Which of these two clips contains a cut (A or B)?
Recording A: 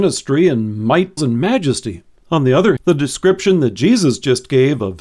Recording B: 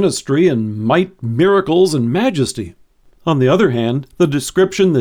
A